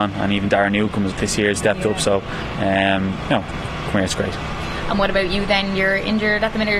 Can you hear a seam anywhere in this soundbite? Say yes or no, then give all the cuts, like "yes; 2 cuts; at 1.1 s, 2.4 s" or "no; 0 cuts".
yes; 2 cuts; at 1.1 s, 1.6 s